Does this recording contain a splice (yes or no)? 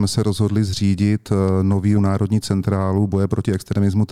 yes